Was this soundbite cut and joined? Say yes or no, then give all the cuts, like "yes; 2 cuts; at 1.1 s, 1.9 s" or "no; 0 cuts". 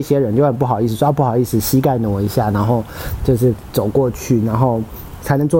no; 0 cuts